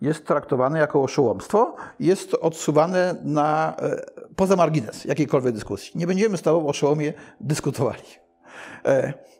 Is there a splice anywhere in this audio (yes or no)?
no